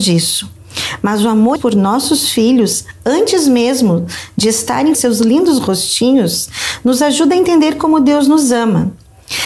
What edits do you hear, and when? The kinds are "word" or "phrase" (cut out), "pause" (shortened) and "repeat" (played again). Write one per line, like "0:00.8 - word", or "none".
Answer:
0:01.6 - phrase
0:04.9 - phrase